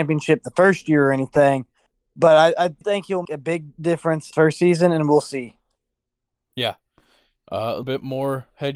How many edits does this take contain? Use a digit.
4